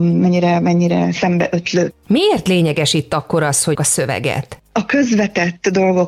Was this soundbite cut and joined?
yes; 1 cut; at 3.7 s

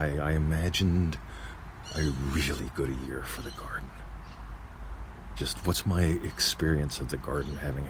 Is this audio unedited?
yes; 0 cuts

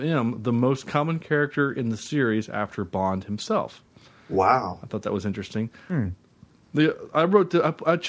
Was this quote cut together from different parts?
no; 0 cuts

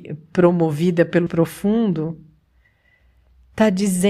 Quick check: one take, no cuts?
no; 1 cut; at 1.3 s

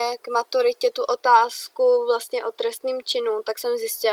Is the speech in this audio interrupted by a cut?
no; 0 cuts

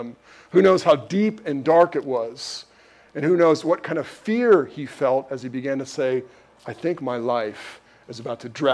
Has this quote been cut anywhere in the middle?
no; 0 cuts

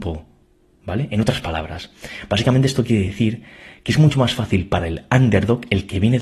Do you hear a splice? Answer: no; 0 cuts

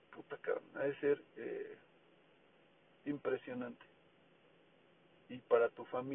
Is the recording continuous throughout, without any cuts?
yes; 0 cuts

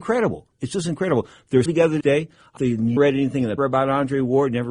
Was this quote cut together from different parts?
yes; 5 cuts; at 1.7 s, 2.0 s, 2.6 s, 3.0 s, 3.6 s

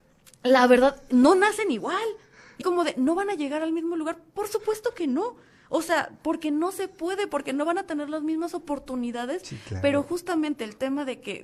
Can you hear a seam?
yes; 1 cut; at 2.6 s

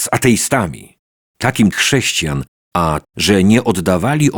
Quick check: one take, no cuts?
no; 2 cuts; at 1.7 s, 3.0 s

